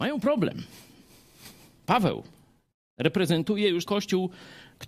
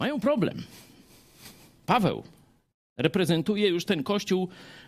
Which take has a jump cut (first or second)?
first